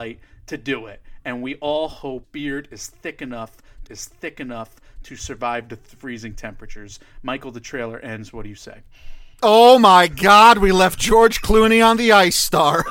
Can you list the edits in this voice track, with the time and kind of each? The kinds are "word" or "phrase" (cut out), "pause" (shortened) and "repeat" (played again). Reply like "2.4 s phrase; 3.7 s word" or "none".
2.2 s word; 3.9 s repeat; 9.3 s pause